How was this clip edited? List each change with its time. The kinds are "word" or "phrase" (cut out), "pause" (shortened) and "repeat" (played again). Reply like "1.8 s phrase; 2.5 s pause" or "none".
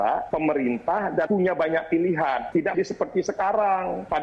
1.3 s word; 2.7 s word